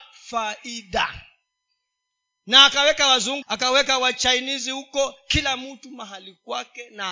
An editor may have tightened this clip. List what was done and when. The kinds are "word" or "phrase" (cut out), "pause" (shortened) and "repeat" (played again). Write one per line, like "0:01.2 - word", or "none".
0:03.4 - word

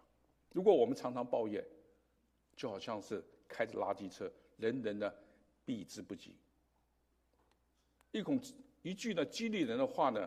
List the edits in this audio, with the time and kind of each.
none

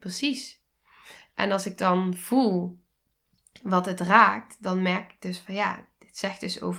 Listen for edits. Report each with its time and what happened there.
none

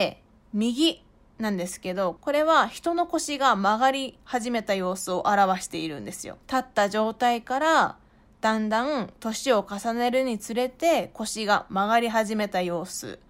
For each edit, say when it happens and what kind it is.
0:06.4 - pause

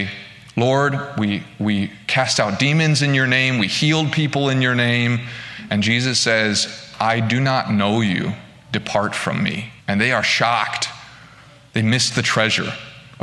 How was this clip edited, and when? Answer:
0:09.8 - pause

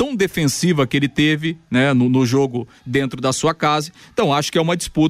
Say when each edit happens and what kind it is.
none

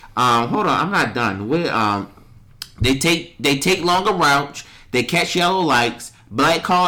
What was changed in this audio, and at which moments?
none

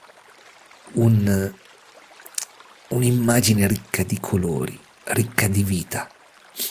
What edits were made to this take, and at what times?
none

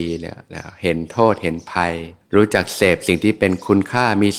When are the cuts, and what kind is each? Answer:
0:02.2 - pause

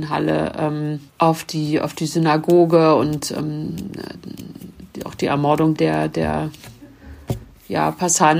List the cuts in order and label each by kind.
0:01.1 - pause
0:05.7 - word

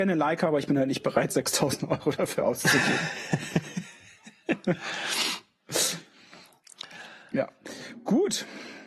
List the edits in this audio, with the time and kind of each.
none

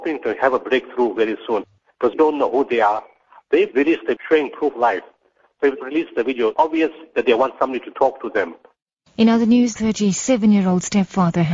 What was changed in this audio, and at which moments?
0:01.2 - word
0:02.1 - word
0:03.7 - word
0:04.2 - word
0:04.7 - word
0:05.8 - word
0:06.5 - word
0:09.8 - word

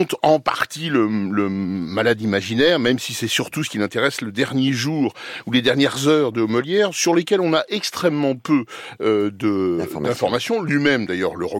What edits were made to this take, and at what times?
none

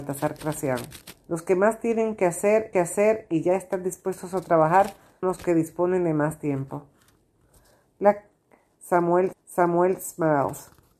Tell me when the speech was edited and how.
0:01.2 - pause
0:02.7 - repeat
0:05.2 - word
0:09.3 - repeat

